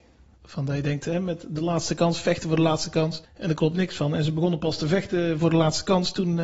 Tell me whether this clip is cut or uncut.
cut